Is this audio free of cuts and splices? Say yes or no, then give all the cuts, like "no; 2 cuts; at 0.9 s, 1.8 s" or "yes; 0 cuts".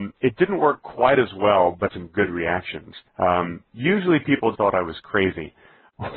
no; 3 cuts; at 1.9 s, 3.1 s, 4.5 s